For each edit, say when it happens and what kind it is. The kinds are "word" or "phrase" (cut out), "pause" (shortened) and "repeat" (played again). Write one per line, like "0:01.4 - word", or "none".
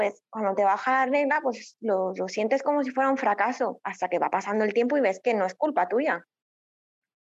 none